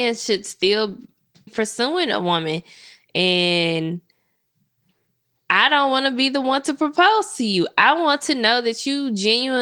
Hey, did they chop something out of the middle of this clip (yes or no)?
yes